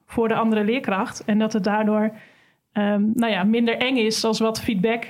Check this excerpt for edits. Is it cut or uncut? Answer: uncut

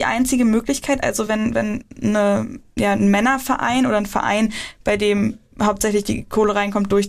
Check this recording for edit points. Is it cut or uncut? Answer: uncut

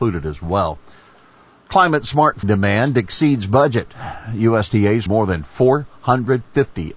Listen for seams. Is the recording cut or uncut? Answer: cut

